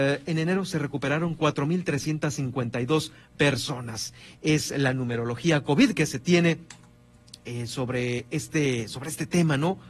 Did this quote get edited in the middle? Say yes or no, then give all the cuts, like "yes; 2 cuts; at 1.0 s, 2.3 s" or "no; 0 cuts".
no; 0 cuts